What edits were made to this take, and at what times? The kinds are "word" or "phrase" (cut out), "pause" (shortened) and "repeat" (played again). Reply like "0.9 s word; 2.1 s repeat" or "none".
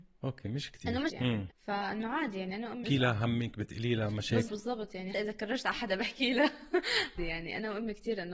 1.1 s word; 1.5 s word; 2.8 s word; 4.5 s word; 5.1 s word; 7.2 s word